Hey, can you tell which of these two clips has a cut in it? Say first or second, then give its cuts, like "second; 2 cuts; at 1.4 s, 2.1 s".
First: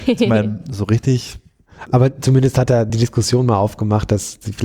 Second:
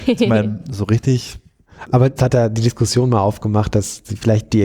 second; 1 cut; at 2.2 s